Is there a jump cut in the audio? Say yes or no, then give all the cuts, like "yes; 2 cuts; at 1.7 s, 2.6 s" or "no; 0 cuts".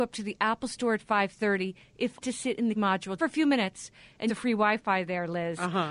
yes; 4 cuts; at 2.2 s, 2.7 s, 3.2 s, 4.3 s